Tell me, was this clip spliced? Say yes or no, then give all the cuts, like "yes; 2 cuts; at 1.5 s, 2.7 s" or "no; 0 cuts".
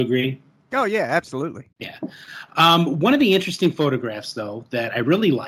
yes; 1 cut; at 1.7 s